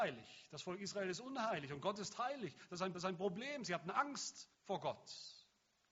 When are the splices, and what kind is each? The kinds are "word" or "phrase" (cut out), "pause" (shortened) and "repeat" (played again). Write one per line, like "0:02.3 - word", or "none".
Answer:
0:02.9 - repeat
0:04.5 - pause